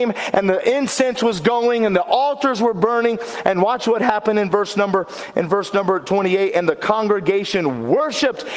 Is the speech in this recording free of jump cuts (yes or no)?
yes